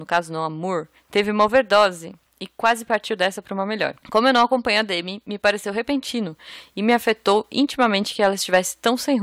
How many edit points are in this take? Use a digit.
1